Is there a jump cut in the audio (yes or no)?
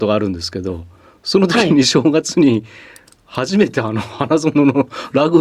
no